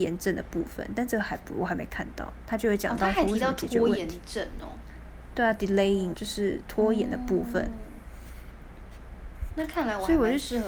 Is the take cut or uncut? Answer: cut